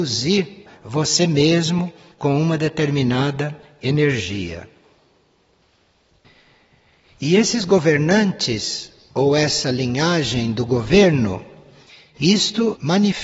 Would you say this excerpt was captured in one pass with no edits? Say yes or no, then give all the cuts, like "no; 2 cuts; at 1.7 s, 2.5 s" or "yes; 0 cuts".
yes; 0 cuts